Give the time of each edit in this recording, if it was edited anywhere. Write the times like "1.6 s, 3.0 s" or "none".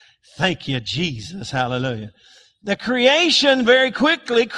none